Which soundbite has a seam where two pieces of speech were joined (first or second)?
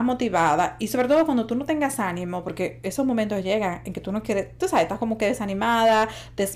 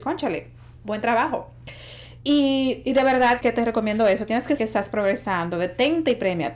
second